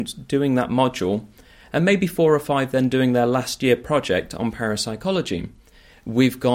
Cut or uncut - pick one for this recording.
uncut